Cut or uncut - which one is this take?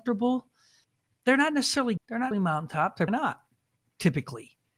cut